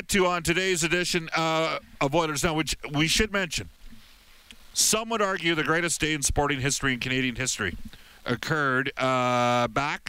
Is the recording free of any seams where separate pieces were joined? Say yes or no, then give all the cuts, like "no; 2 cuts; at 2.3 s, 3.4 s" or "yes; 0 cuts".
yes; 0 cuts